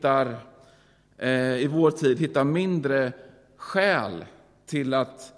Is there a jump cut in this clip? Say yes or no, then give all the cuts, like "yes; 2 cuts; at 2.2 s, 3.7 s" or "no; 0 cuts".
no; 0 cuts